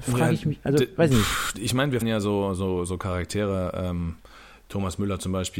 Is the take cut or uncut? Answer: cut